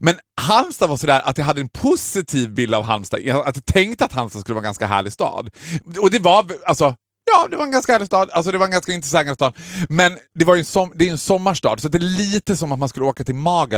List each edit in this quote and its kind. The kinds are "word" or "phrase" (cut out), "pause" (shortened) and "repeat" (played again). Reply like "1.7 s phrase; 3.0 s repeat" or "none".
none